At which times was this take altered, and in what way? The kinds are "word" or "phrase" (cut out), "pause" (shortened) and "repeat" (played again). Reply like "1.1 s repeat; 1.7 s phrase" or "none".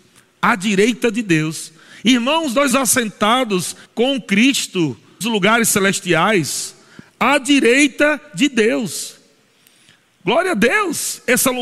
2.7 s word; 3.9 s pause; 5.2 s word